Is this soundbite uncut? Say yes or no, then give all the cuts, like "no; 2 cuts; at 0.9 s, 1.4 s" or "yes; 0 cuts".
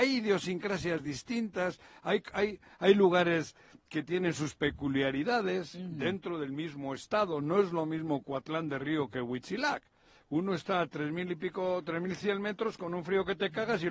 yes; 0 cuts